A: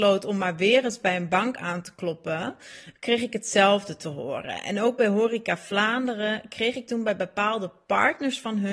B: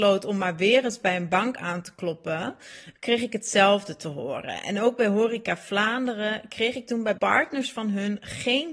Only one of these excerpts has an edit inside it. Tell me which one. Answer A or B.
B